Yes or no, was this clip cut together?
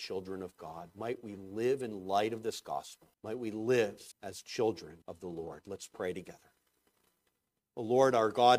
yes